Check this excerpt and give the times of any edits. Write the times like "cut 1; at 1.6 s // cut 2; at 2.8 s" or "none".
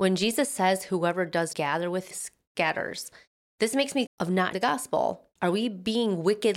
cut 1; at 1.5 s // cut 2; at 2.1 s // cut 3; at 4.1 s // cut 4; at 4.5 s // cut 5; at 5.4 s